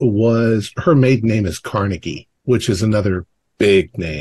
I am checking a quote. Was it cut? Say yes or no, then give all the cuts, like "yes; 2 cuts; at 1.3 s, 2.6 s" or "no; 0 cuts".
yes; 1 cut; at 2.4 s